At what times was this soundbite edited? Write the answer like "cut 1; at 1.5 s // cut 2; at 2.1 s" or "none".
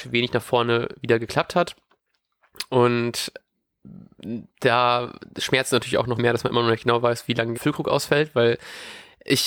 cut 1; at 4.5 s // cut 2; at 6.2 s // cut 3; at 7.5 s